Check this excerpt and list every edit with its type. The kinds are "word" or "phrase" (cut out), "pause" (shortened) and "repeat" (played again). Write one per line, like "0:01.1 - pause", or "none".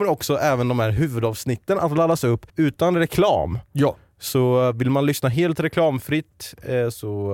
0:02.5 - pause